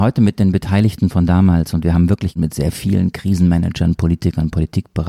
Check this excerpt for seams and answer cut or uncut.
uncut